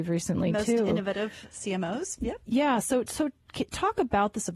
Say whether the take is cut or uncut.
uncut